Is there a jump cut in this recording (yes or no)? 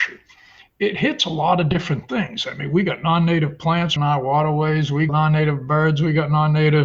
yes